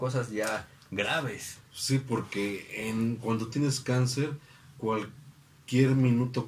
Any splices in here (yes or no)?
no